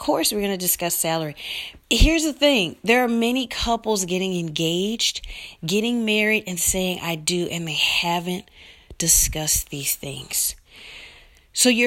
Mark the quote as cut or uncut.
cut